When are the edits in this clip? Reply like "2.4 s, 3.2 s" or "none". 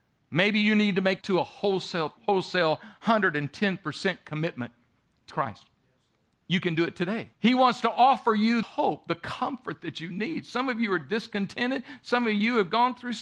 1.2 s, 2.2 s, 5.3 s, 7.3 s, 8.6 s